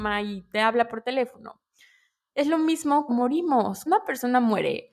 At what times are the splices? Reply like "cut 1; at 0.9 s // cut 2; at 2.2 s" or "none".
cut 1; at 3.1 s // cut 2; at 3.9 s

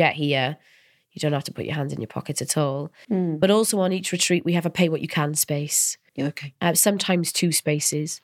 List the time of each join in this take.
none

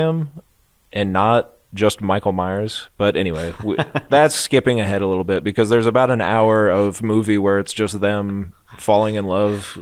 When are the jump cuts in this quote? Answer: none

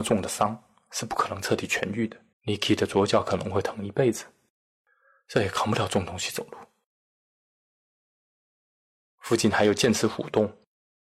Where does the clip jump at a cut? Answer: cut 1; at 2.3 s

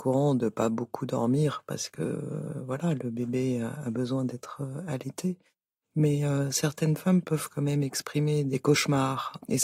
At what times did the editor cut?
none

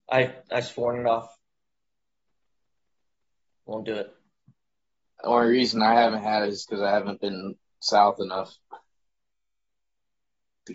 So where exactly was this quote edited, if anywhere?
none

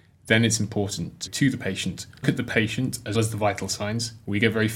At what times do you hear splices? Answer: cut 1; at 1.3 s // cut 2; at 2.2 s // cut 3; at 3.1 s

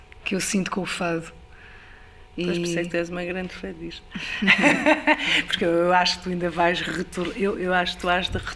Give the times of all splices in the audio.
none

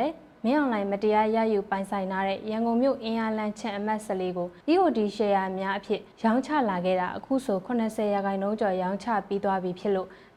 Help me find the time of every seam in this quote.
cut 1; at 4.6 s // cut 2; at 6.1 s

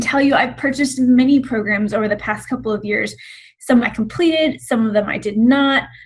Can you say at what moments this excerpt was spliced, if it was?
cut 1; at 3.8 s

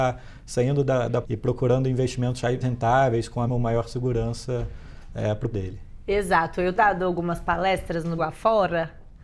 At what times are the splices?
cut 1; at 1.2 s // cut 2; at 2.6 s // cut 3; at 3.5 s // cut 4; at 5.5 s // cut 5; at 6.8 s // cut 6; at 8.2 s

